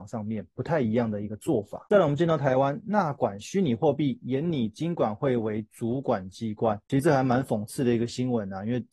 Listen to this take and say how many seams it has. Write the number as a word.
zero